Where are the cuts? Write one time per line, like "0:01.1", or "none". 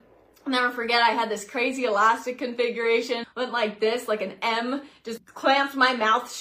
0:03.2
0:05.2